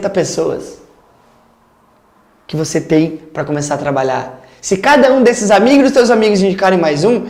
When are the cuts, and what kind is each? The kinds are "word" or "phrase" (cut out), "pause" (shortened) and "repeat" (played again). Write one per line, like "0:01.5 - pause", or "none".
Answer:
none